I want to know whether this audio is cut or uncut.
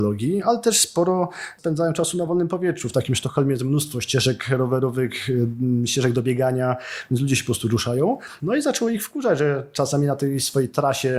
uncut